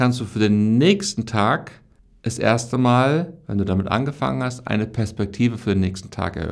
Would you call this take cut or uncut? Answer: uncut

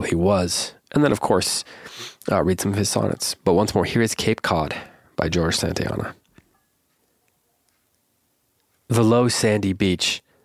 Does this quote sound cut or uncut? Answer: uncut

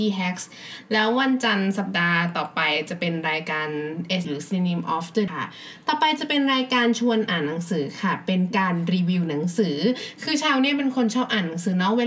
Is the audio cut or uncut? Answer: cut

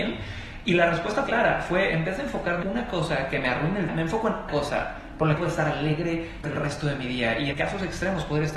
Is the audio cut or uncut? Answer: cut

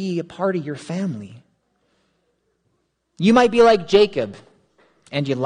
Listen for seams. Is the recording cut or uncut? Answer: uncut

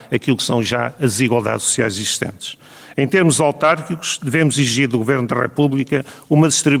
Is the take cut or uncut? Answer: uncut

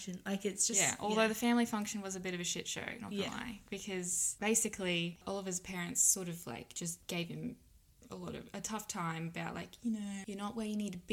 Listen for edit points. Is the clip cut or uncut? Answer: uncut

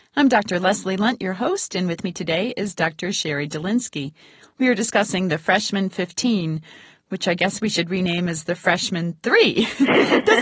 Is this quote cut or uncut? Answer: uncut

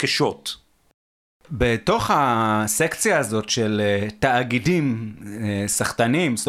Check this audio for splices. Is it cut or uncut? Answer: uncut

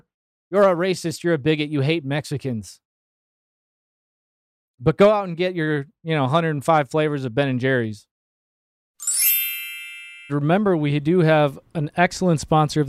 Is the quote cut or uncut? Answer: cut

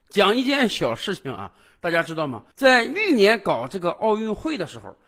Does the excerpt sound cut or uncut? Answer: uncut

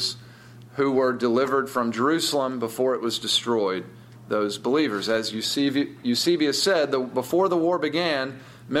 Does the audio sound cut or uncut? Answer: uncut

